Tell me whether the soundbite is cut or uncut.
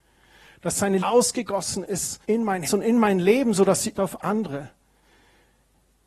cut